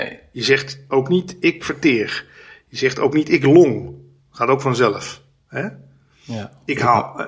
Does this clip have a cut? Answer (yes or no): no